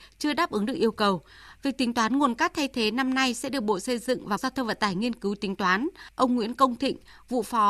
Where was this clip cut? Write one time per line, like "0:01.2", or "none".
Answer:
0:04.4